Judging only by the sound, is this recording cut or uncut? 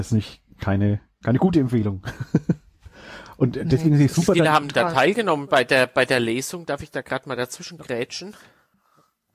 uncut